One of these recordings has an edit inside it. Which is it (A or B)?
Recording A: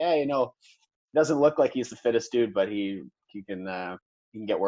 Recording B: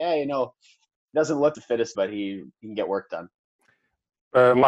B